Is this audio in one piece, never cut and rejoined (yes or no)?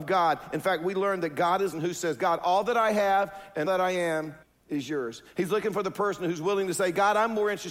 no